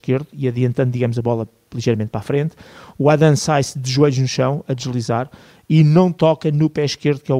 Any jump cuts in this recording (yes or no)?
no